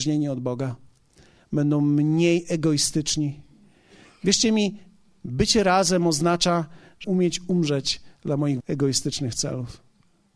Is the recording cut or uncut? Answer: cut